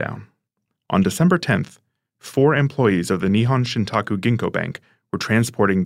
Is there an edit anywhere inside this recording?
no; 0 cuts

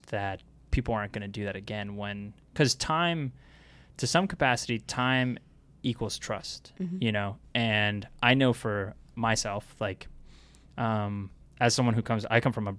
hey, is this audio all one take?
yes; 0 cuts

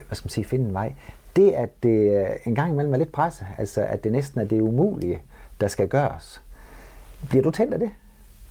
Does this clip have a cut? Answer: no; 0 cuts

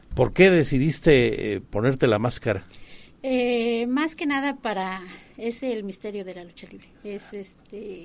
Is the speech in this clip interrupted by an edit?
yes; 2 cuts; at 1.6 s, 6.9 s

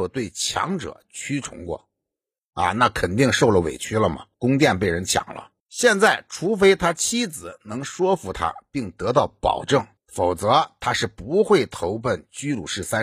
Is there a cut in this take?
yes; 3 cuts; at 4.3 s, 5.6 s, 10.0 s

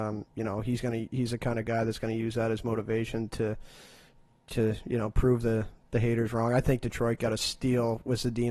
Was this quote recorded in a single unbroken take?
yes; 0 cuts

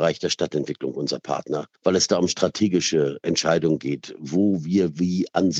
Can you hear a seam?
yes; 1 cut; at 1.8 s

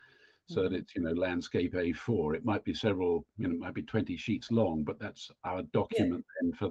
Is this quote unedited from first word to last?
no; 1 cut; at 3.3 s

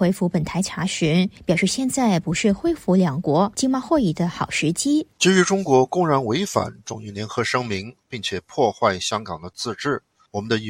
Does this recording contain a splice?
yes; 1 cut; at 5.1 s

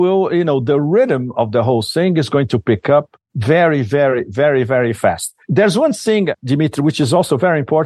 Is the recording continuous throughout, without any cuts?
no; 2 cuts; at 3.2 s, 5.4 s

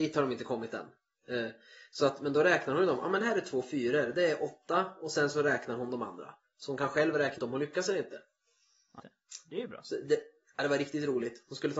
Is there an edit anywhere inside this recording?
yes; 2 cuts; at 7.4 s, 9.0 s

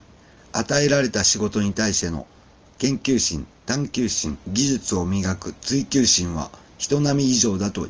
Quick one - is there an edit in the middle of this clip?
yes; 1 cut; at 4.4 s

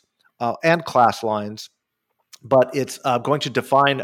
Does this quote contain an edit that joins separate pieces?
no; 0 cuts

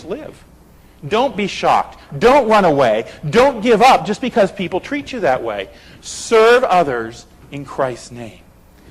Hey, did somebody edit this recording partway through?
no; 0 cuts

